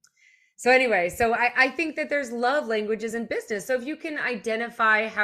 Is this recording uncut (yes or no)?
yes